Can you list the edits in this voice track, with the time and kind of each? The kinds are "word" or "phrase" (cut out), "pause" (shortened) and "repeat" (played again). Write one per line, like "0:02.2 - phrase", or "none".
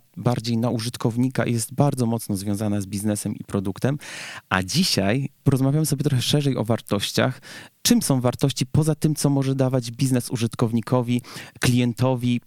none